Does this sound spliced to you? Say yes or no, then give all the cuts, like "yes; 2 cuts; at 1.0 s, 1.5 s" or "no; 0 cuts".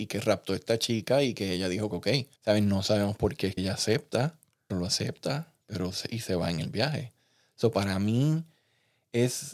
yes; 5 cuts; at 1.9 s, 2.4 s, 3.6 s, 4.7 s, 5.6 s